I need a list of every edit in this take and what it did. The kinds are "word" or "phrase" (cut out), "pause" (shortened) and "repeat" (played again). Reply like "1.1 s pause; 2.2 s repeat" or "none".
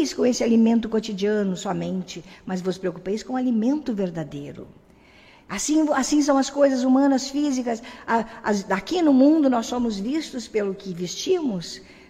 none

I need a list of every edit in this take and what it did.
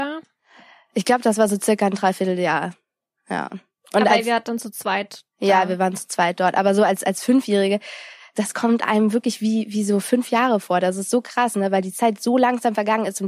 none

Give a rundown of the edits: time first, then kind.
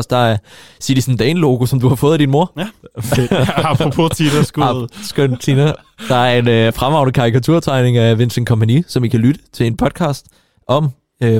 none

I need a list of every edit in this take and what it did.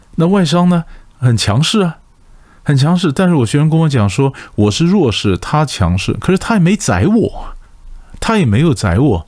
none

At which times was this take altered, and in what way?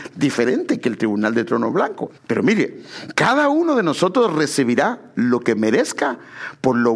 2.2 s pause

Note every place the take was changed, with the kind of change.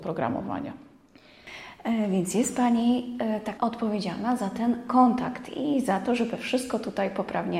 3.6 s word

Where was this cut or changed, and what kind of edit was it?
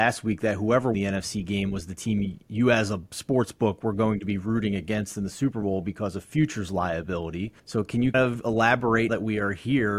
0.9 s word; 7.6 s pause; 8.1 s word; 9.1 s word

